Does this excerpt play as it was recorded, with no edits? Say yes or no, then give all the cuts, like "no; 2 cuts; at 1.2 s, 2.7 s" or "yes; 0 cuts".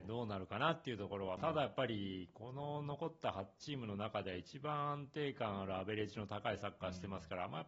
no; 1 cut; at 1.4 s